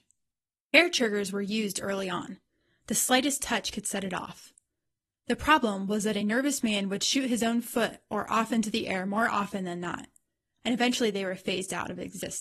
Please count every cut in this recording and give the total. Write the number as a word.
zero